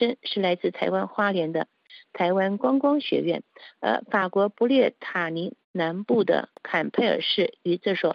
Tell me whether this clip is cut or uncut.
cut